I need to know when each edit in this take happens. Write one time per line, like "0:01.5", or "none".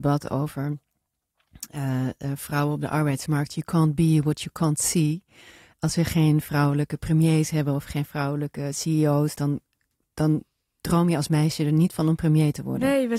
none